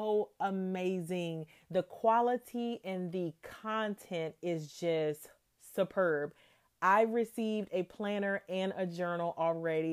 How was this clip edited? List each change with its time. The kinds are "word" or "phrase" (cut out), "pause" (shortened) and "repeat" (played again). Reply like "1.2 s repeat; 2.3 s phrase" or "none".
none